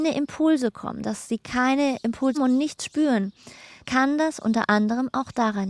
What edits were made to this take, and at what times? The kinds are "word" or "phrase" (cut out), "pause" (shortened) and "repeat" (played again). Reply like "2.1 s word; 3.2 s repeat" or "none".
2.3 s word; 3.8 s word